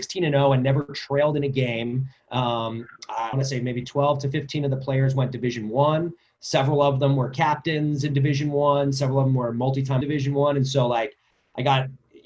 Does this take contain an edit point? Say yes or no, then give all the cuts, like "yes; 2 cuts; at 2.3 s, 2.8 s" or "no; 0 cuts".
yes; 2 cuts; at 3.3 s, 10.0 s